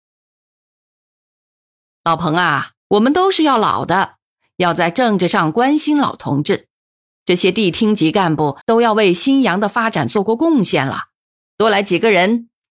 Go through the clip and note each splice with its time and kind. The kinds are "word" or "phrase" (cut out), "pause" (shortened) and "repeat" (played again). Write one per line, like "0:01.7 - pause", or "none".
0:02.8 - pause
0:08.6 - pause